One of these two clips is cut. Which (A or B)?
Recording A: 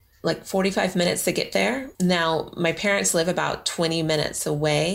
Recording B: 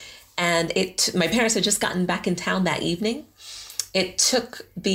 A